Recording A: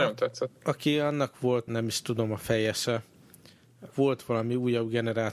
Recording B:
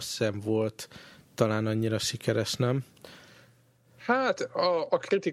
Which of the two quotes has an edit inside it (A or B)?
A